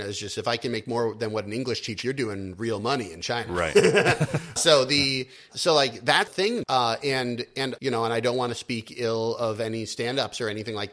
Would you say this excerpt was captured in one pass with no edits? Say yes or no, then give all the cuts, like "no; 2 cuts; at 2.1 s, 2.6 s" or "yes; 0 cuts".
no; 6 cuts; at 2.0 s, 4.6 s, 5.5 s, 6.3 s, 6.6 s, 7.8 s